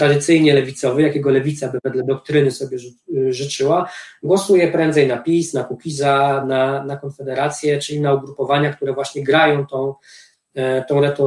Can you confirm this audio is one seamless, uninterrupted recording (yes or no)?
yes